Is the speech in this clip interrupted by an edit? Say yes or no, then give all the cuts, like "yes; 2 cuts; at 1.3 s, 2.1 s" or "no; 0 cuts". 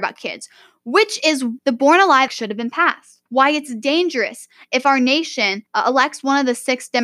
yes; 4 cuts; at 1.6 s, 2.3 s, 3.3 s, 5.7 s